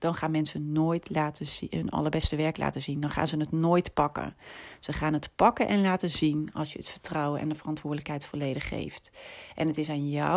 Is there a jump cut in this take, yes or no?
no